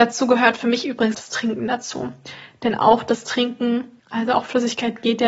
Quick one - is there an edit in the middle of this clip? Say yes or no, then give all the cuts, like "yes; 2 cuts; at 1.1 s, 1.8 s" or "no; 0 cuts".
yes; 2 cuts; at 1.1 s, 4.0 s